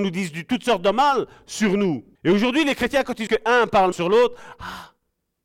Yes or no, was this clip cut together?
yes